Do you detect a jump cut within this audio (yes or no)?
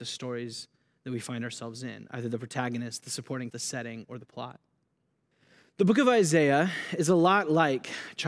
yes